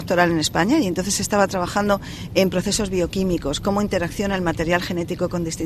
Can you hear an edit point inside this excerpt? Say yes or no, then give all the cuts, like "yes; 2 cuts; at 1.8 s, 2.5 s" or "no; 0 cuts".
no; 0 cuts